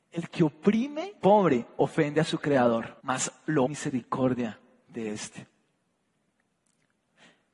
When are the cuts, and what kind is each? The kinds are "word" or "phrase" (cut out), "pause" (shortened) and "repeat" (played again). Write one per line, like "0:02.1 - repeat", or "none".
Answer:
0:01.2 - word
0:03.0 - pause
0:03.7 - phrase